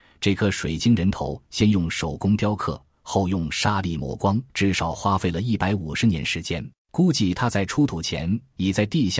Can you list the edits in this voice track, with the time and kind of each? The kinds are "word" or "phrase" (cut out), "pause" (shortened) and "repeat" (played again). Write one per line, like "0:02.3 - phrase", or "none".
0:04.5 - pause
0:06.8 - pause